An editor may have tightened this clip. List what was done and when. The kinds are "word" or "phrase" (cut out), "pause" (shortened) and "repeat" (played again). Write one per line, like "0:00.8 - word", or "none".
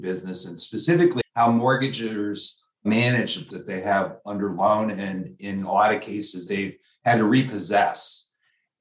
0:01.2 - word
0:03.5 - word
0:06.5 - word